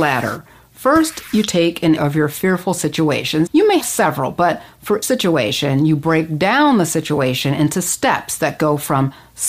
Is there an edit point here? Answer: yes; 4 cuts; at 2.0 s, 3.5 s, 3.8 s, 5.0 s

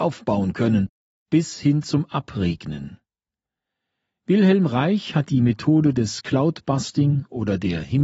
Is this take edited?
no; 0 cuts

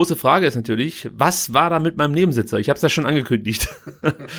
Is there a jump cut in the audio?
no; 0 cuts

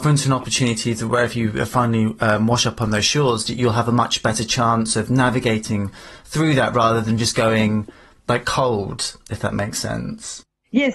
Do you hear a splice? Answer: no; 0 cuts

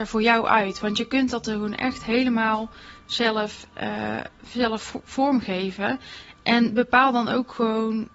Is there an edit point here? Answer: no; 0 cuts

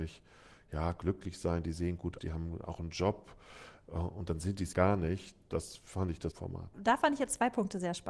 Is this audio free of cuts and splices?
no; 3 cuts; at 2.2 s, 4.7 s, 6.3 s

